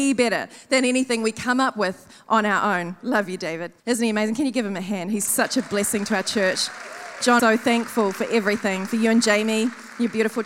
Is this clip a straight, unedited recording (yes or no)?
no